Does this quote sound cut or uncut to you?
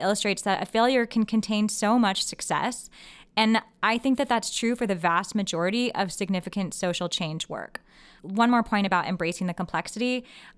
uncut